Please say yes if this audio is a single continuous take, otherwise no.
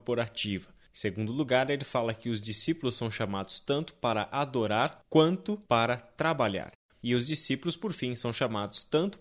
yes